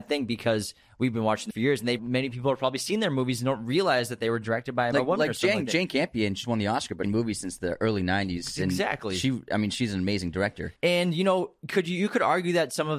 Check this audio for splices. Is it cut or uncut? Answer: cut